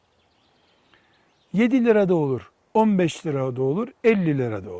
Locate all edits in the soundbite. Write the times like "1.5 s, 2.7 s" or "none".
none